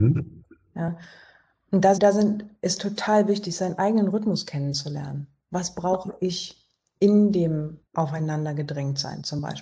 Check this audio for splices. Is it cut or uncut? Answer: cut